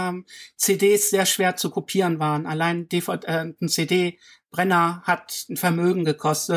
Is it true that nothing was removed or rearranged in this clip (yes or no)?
yes